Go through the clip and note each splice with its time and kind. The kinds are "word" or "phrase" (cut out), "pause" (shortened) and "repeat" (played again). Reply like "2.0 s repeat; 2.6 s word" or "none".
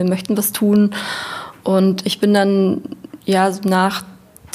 2.0 s word